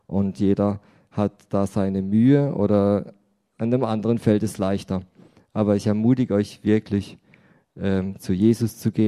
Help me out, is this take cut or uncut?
uncut